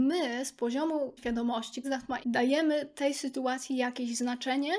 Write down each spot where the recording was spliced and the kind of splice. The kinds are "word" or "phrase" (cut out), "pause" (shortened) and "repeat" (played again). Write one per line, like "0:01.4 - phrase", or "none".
0:01.2 - word
0:01.8 - word
0:02.2 - word